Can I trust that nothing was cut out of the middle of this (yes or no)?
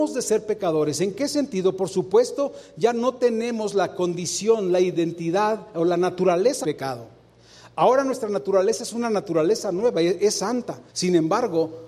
no